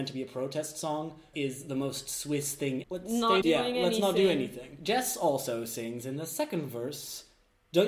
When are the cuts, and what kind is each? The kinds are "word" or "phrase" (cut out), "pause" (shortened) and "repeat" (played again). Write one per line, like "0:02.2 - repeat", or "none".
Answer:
0:01.3 - phrase
0:02.8 - phrase
0:03.4 - word